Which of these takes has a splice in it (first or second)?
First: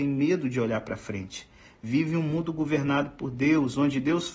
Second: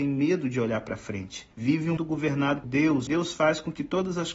second